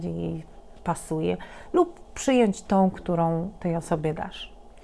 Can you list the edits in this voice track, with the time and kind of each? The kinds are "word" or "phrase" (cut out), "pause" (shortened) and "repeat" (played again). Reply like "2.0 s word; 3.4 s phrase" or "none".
none